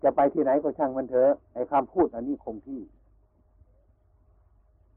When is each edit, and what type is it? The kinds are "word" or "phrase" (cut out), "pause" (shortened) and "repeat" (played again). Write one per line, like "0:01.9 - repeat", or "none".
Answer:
0:01.4 - pause

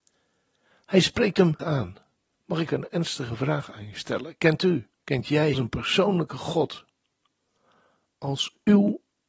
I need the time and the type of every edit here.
0:01.6 - word
0:02.3 - pause
0:02.7 - phrase
0:05.0 - pause
0:05.5 - phrase

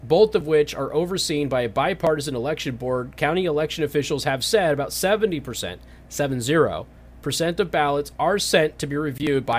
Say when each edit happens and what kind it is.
none

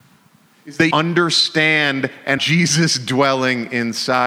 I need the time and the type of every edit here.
0:00.9 - word
0:02.4 - word

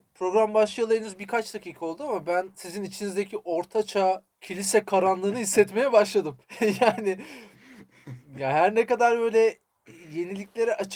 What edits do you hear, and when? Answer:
0:04.3 - pause
0:06.4 - pause

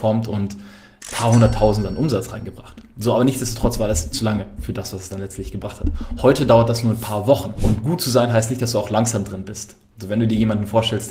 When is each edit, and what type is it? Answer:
0:04.1 - word

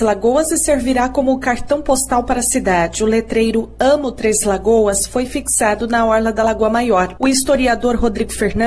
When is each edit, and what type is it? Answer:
none

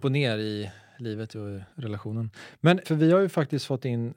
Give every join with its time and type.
0:01.7 - pause
0:02.8 - word

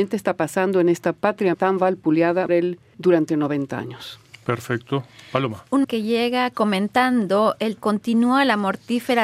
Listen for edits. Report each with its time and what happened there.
0:01.5 - word
0:02.5 - word
0:02.9 - word
0:05.8 - word
0:07.8 - word

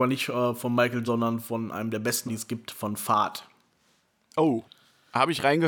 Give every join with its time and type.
0:01.0 - word
0:02.3 - word

